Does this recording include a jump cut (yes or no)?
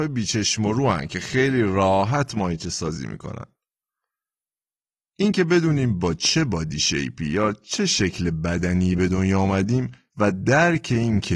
no